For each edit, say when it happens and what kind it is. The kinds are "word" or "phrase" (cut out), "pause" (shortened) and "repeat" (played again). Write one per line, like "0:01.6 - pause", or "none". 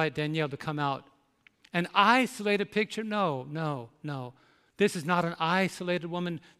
none

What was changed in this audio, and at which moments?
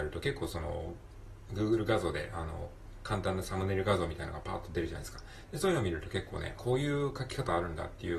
0:06.6 - word

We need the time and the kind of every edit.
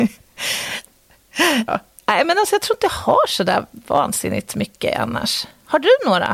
0:01.7 - word

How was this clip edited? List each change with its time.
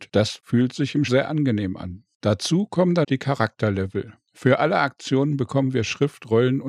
0:01.1 - word
0:03.0 - word

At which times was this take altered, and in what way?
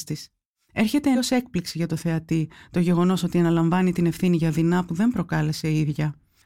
0:01.1 - word

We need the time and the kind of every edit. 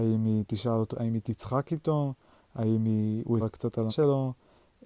0:00.9 - word
0:03.4 - word
0:03.9 - word

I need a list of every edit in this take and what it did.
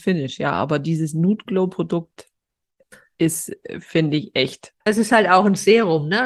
0:04.8 - pause

